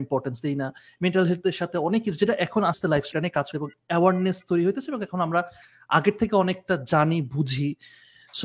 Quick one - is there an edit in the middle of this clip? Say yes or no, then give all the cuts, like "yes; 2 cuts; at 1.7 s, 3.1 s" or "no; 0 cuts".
yes; 3 cuts; at 2.7 s, 3.1 s, 3.5 s